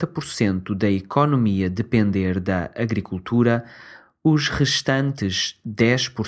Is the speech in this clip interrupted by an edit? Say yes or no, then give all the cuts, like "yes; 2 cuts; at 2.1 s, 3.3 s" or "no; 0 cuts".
no; 0 cuts